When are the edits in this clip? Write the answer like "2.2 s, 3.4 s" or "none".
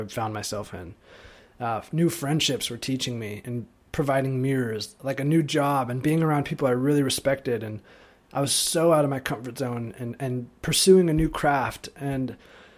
none

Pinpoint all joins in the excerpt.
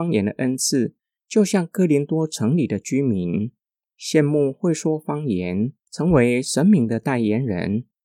none

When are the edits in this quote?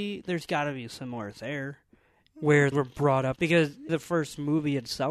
1.3 s, 2.7 s, 3.4 s, 3.9 s

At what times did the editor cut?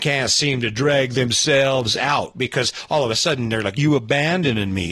3.8 s

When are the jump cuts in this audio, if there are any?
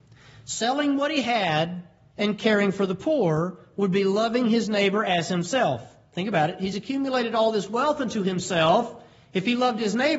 none

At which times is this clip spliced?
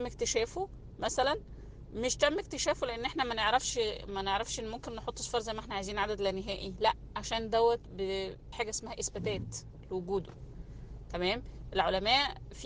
8.5 s

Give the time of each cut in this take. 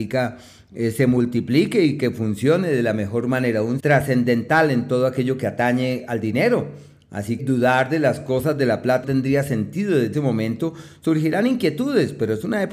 3.8 s, 7.4 s, 9.0 s, 10.1 s

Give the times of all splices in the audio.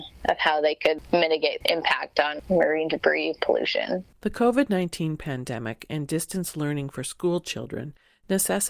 1.6 s, 4.1 s

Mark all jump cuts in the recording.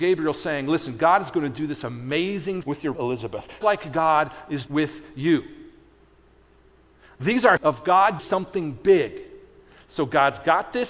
2.6 s, 2.9 s, 3.6 s, 4.7 s, 7.6 s, 8.2 s

